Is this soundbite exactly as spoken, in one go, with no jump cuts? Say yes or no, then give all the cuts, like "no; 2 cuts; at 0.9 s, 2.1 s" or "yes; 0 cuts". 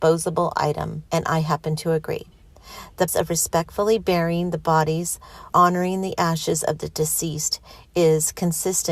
no; 3 cuts; at 1.1 s, 3.1 s, 5.5 s